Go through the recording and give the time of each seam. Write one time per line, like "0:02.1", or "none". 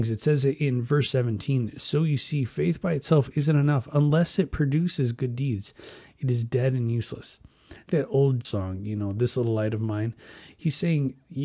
0:07.9
0:08.4